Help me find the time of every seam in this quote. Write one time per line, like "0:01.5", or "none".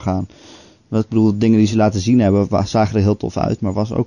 none